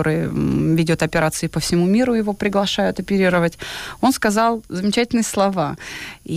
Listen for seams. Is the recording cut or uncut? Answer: uncut